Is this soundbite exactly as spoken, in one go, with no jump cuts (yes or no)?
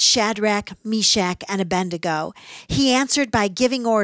yes